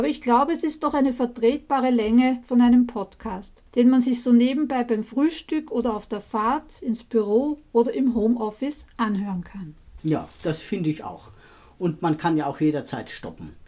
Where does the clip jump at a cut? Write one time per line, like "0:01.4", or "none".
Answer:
none